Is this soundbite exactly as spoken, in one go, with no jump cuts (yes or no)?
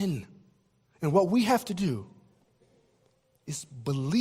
yes